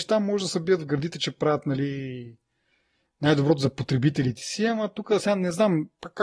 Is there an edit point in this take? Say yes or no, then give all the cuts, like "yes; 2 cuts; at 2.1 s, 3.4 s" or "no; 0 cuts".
no; 0 cuts